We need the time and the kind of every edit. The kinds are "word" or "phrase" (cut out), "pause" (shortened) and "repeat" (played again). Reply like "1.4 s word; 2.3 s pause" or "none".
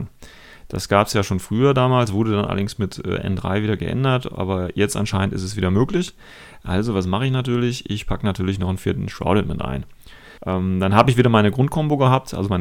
10.4 s pause